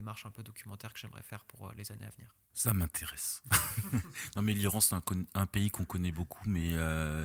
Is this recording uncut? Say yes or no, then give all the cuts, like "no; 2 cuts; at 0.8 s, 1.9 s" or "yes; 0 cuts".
no; 1 cut; at 2.4 s